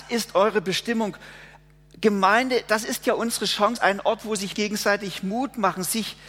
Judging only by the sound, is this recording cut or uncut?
cut